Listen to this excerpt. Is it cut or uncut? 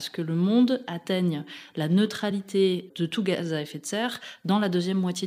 uncut